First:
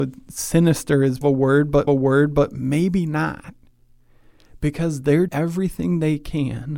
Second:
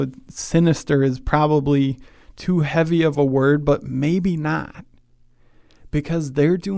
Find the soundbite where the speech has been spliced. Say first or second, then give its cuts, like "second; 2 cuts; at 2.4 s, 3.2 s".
first; 3 cuts; at 1.2 s, 1.9 s, 5.3 s